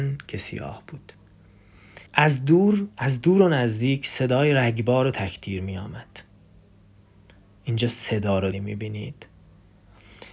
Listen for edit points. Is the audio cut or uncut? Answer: cut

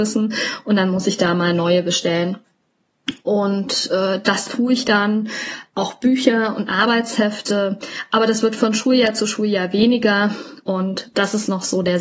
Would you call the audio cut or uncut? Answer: uncut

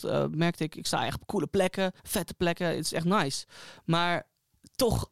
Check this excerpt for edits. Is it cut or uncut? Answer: cut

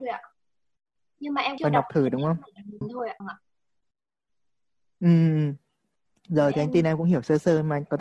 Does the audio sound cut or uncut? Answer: cut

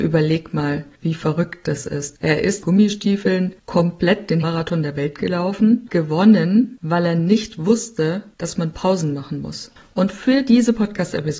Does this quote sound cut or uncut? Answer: cut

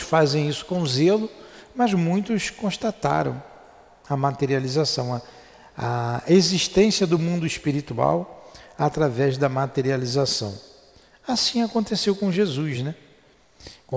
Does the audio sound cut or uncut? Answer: uncut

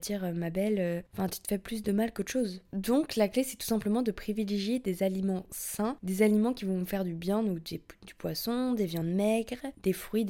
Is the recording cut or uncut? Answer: uncut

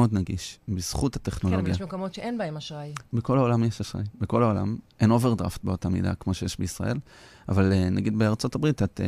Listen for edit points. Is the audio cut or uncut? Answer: uncut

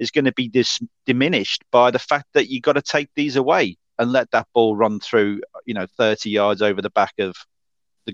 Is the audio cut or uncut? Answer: uncut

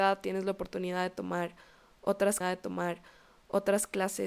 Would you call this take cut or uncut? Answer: cut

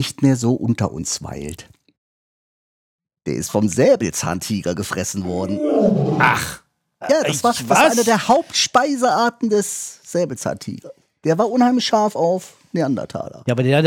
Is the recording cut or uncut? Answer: uncut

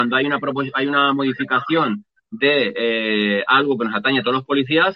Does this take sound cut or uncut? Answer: uncut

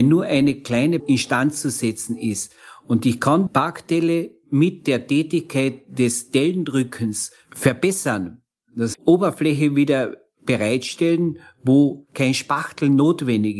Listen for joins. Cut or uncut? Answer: cut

